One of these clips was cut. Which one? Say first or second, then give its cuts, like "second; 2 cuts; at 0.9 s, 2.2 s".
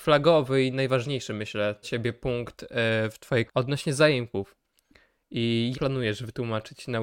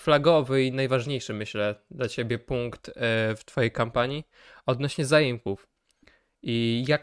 first; 3 cuts; at 1.8 s, 3.5 s, 5.7 s